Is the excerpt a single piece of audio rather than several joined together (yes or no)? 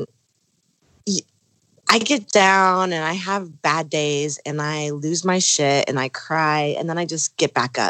yes